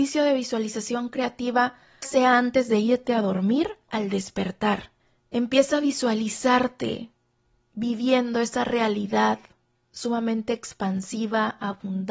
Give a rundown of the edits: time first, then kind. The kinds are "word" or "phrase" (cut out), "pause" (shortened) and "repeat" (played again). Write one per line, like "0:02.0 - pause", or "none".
0:02.0 - word
0:03.9 - word
0:05.0 - pause